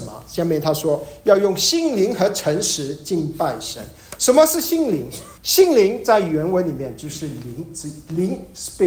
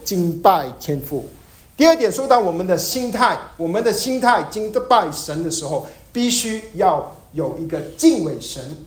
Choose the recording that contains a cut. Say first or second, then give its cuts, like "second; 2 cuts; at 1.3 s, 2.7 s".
first; 1 cut; at 5.4 s